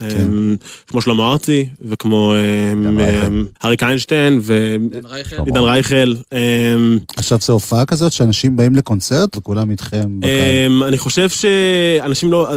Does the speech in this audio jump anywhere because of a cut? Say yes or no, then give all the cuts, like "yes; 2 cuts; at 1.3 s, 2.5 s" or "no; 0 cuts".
yes; 2 cuts; at 3.6 s, 9.3 s